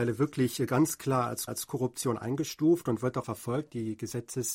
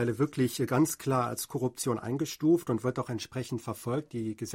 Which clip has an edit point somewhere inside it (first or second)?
first